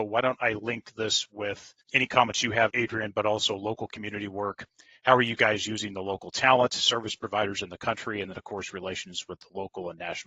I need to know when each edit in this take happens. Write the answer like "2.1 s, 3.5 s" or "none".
none

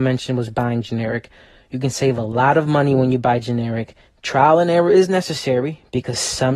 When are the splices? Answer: 4.1 s

